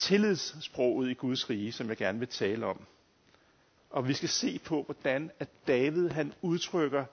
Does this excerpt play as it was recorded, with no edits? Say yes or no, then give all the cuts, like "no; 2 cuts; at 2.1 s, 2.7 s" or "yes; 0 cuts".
yes; 0 cuts